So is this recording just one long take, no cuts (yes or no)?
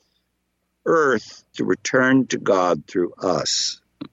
no